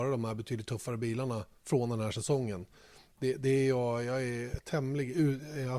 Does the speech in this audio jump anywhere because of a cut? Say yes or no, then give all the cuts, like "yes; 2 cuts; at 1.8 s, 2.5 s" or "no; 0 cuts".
no; 0 cuts